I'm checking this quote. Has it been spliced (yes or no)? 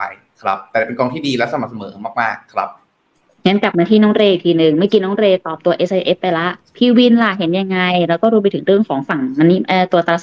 no